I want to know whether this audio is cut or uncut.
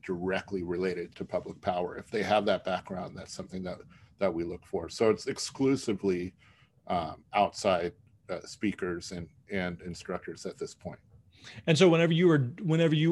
cut